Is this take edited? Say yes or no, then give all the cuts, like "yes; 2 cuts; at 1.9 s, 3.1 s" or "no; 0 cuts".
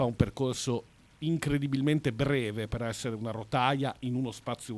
no; 0 cuts